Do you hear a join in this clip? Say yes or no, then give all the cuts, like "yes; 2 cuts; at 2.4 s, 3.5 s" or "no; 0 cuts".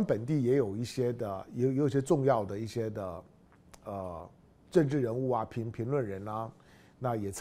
no; 0 cuts